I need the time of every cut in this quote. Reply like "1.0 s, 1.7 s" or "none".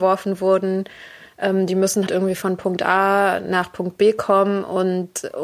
2.1 s